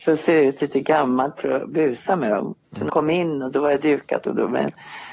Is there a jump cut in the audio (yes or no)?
yes